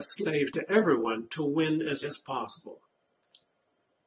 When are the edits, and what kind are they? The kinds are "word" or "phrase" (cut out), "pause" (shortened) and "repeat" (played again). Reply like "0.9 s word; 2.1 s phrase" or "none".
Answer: 2.0 s word